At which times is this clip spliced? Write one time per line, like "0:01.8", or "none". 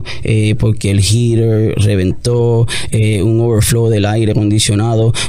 none

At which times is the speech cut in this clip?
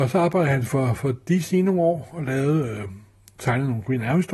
none

